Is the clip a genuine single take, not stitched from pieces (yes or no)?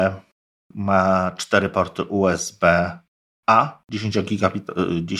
yes